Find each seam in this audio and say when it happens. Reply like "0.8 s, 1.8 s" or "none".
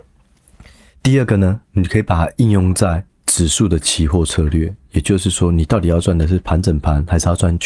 1.6 s, 3.1 s